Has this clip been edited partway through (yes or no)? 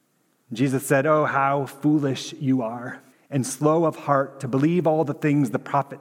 yes